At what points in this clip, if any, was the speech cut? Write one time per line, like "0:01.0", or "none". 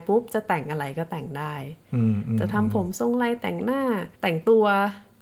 0:04.1